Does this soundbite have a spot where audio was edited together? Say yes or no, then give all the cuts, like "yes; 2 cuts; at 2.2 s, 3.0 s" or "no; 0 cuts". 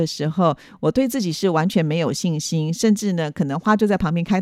no; 0 cuts